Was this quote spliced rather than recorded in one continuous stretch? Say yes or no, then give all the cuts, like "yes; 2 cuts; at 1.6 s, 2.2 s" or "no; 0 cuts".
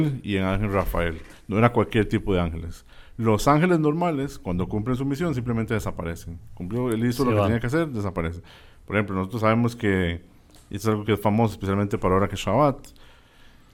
no; 0 cuts